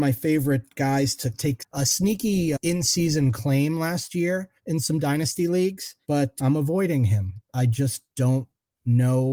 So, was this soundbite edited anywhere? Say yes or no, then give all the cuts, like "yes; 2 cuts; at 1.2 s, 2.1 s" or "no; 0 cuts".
yes; 2 cuts; at 4.6 s, 6.0 s